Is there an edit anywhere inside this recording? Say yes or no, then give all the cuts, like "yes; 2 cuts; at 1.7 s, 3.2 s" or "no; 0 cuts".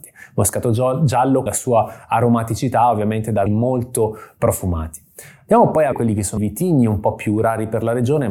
yes; 4 cuts; at 1.5 s, 3.5 s, 5.9 s, 6.4 s